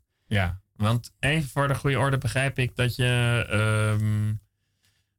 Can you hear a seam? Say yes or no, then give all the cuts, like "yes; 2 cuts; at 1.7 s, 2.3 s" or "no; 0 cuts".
no; 0 cuts